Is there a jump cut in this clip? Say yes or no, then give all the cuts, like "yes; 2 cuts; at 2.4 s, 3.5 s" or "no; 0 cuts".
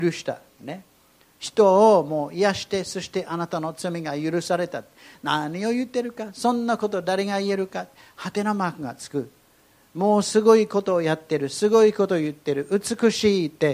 no; 0 cuts